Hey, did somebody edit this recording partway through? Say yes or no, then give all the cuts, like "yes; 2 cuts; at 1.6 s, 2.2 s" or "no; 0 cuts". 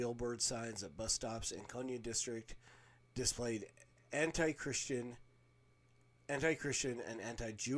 no; 0 cuts